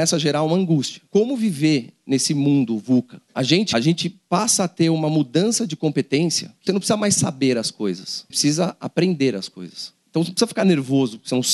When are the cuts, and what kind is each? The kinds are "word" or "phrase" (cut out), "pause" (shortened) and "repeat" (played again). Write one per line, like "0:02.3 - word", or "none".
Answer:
0:01.1 - pause
0:03.7 - phrase
0:06.7 - phrase
0:08.3 - word